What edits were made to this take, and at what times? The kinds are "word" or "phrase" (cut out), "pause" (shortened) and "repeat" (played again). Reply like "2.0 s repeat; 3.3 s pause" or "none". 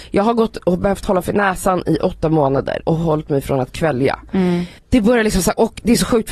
2.8 s word; 4.8 s pause